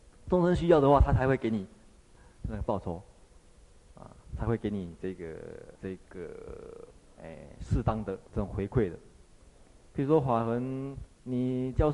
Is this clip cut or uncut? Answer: cut